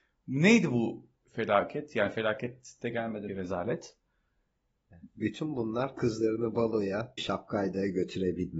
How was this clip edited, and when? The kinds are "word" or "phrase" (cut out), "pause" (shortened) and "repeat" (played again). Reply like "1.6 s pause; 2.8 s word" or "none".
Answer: 3.3 s word; 7.2 s word